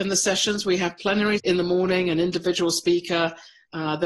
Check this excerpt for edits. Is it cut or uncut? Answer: cut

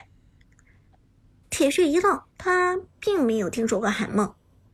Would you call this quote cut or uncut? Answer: cut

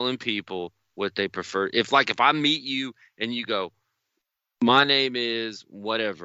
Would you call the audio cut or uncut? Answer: uncut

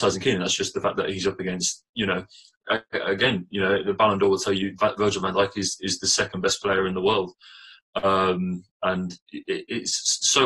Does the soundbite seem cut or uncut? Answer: uncut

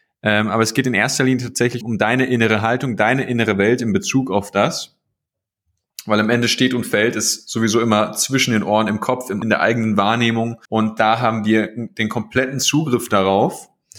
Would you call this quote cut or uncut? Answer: cut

